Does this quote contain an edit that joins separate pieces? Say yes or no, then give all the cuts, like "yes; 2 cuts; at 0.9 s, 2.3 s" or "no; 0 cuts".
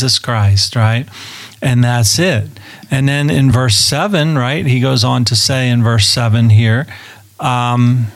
no; 0 cuts